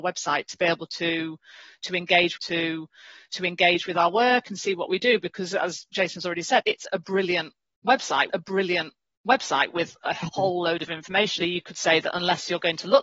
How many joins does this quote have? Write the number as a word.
four